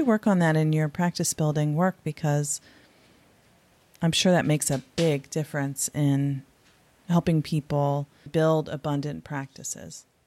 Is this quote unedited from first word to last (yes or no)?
no